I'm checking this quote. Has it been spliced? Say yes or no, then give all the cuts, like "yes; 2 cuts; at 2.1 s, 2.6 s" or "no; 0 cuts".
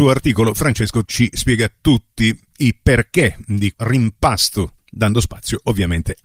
yes; 2 cuts; at 1.1 s, 3.7 s